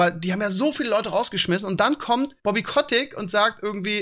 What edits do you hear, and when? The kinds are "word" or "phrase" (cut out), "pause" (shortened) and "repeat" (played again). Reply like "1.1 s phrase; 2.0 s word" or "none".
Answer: 2.4 s pause

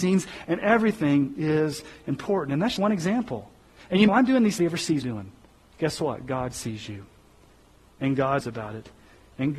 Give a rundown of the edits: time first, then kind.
2.8 s word; 4.1 s phrase; 4.6 s phrase; 5.0 s phrase; 5.6 s pause; 8.4 s word

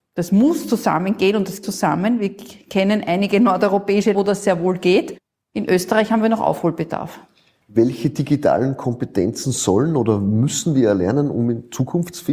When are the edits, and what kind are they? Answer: 1.6 s word; 4.1 s word

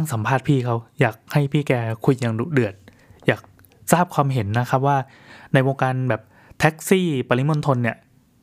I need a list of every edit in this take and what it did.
none

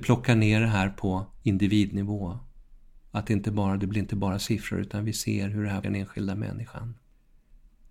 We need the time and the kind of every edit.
1.4 s pause; 5.8 s word

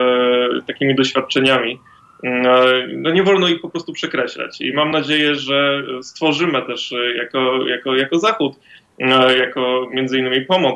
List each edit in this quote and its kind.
none

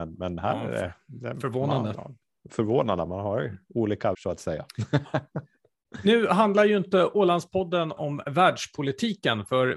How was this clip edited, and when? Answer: 4.1 s word; 8.0 s word

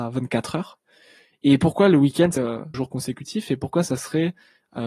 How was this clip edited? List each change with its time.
2.4 s word; 2.7 s phrase

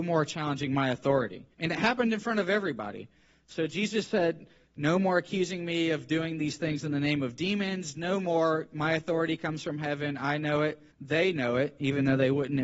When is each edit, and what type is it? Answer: 1.5 s pause; 10.9 s pause

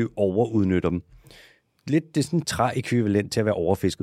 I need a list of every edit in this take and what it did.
2.4 s word

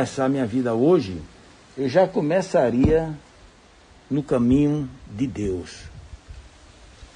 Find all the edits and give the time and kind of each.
none

